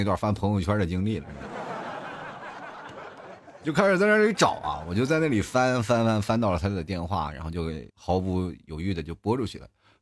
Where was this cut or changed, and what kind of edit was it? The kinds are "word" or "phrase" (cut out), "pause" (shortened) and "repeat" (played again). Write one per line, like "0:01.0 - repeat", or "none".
0:07.9 - pause